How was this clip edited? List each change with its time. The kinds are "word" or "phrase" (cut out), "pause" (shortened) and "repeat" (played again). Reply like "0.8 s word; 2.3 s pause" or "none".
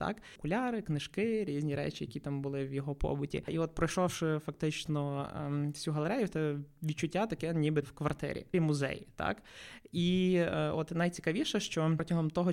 7.8 s word; 8.5 s word